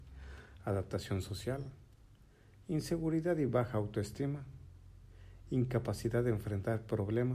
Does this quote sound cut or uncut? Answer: uncut